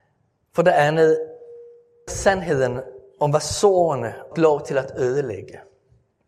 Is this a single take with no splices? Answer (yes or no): no